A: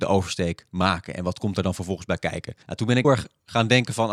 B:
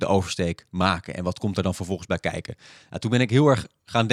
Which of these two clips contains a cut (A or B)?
A